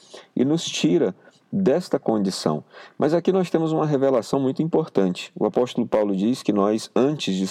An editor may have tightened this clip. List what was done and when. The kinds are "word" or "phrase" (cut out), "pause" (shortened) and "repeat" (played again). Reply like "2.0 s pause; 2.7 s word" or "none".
none